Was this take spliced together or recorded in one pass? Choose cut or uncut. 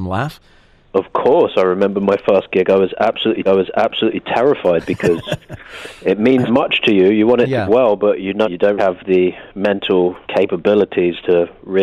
cut